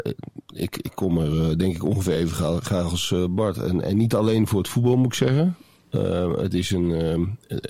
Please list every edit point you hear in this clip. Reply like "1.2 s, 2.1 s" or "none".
none